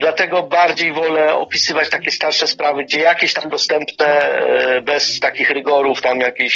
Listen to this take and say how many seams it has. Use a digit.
1